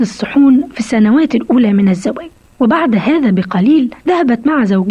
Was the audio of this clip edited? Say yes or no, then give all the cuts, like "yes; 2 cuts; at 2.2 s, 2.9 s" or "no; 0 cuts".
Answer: yes; 2 cuts; at 2.5 s, 4.0 s